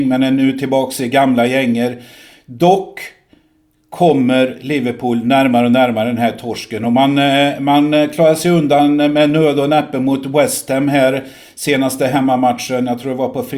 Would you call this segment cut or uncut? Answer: uncut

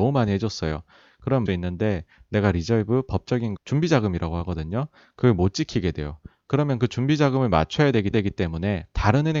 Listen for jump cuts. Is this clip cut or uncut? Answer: cut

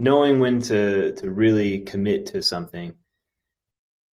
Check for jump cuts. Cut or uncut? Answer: uncut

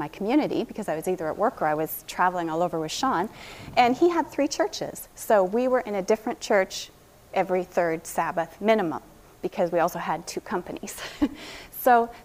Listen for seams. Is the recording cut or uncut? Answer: uncut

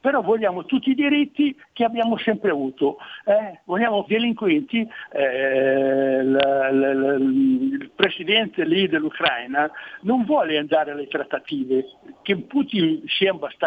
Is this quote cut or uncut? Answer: cut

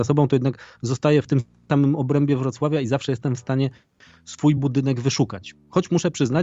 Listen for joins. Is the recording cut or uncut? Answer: uncut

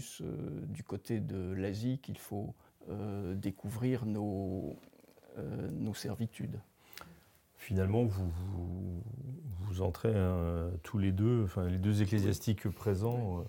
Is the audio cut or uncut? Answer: cut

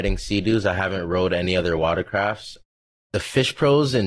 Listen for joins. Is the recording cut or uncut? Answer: uncut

